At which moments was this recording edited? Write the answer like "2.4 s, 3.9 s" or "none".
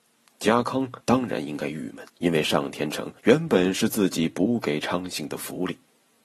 1.0 s, 2.1 s, 3.2 s